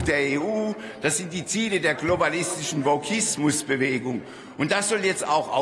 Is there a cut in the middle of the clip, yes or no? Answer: no